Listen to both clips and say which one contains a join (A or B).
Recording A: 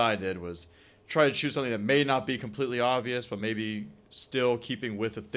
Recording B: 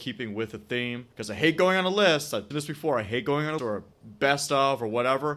B